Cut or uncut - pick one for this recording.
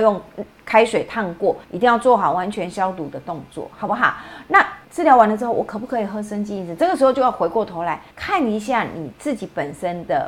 cut